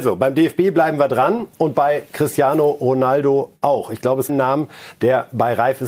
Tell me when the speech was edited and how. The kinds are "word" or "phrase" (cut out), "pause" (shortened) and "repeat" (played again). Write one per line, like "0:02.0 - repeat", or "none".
0:04.3 - phrase